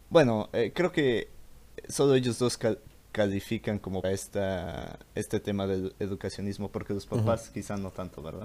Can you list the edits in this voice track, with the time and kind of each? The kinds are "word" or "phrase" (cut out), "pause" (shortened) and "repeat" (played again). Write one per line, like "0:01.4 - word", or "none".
0:04.0 - word

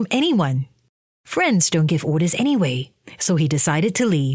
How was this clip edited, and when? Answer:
none

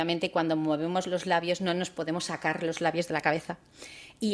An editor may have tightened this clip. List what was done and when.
none

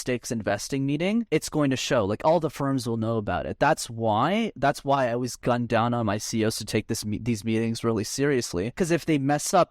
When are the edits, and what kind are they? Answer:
none

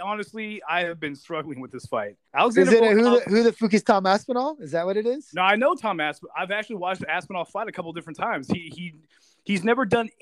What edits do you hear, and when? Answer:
0:02.3 - pause

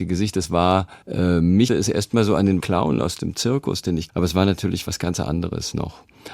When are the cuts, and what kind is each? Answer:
0:01.0 - pause
0:01.7 - word
0:02.6 - word
0:04.1 - word

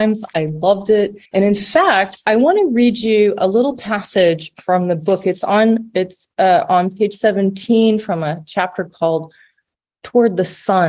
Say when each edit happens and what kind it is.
0:01.3 - pause

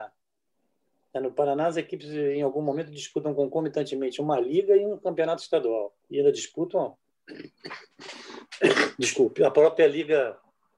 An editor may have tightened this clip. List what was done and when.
0:06.0 - pause

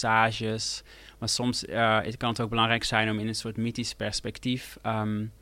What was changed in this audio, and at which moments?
none

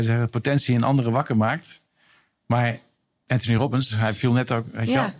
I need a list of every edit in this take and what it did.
none

